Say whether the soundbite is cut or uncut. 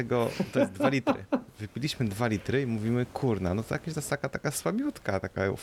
uncut